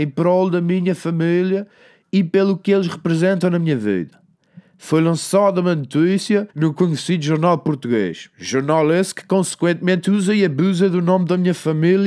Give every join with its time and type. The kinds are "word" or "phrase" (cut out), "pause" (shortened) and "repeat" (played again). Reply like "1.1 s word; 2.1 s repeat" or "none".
6.5 s pause